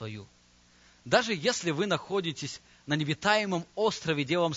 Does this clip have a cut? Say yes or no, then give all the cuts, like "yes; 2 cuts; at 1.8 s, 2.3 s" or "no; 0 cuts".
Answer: no; 0 cuts